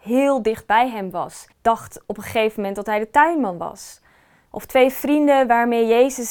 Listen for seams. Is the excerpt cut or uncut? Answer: cut